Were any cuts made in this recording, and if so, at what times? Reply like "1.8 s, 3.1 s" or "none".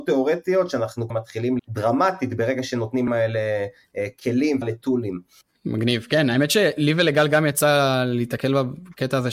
1.1 s, 1.6 s, 3.1 s, 4.6 s

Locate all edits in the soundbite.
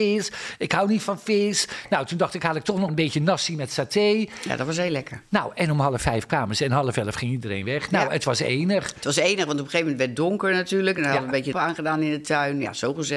2.9 s, 11.5 s

